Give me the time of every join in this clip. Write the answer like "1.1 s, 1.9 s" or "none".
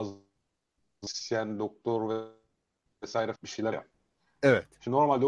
3.3 s, 3.7 s